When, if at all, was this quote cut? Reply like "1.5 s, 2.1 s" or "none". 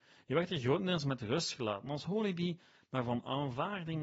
none